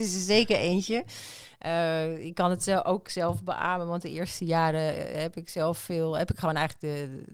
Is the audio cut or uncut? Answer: uncut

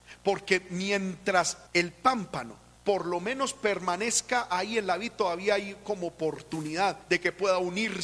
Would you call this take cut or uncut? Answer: cut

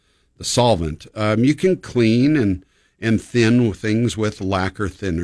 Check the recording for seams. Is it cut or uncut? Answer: uncut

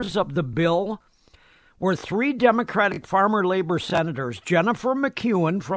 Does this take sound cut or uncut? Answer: uncut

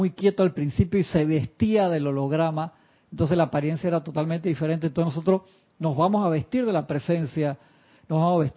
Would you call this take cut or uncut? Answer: uncut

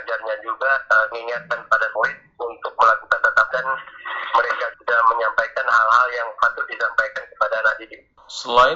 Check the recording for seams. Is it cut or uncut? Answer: cut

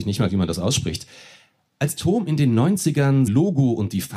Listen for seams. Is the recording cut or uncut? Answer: cut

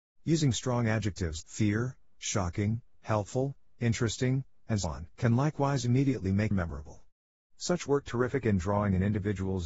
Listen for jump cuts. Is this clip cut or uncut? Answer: cut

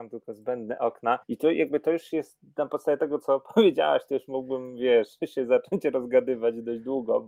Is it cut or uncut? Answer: cut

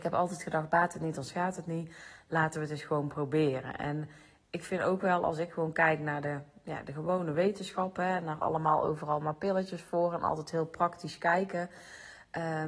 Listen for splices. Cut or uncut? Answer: uncut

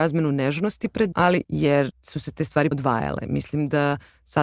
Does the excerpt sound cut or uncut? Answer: cut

